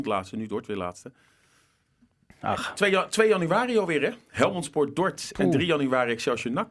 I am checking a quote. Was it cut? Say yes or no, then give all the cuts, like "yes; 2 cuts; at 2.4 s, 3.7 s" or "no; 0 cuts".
no; 0 cuts